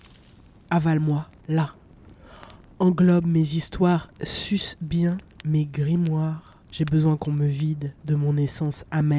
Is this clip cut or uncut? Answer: cut